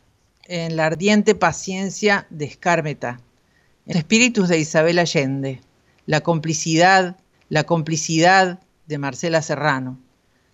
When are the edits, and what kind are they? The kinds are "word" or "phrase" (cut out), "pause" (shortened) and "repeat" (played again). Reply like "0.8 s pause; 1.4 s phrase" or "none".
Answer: 3.9 s word; 7.3 s repeat